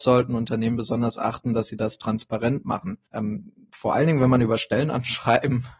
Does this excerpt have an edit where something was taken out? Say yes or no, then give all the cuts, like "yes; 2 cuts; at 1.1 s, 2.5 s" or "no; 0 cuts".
yes; 1 cut; at 3.1 s